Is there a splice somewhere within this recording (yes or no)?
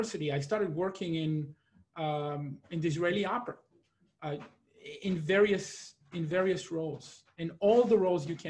no